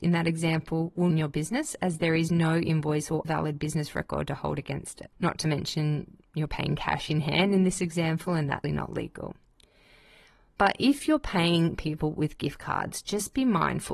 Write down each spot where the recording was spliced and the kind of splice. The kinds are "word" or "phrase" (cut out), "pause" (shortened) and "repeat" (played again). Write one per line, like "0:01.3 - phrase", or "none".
0:01.1 - phrase
0:03.2 - word
0:05.1 - pause
0:06.5 - word
0:08.6 - word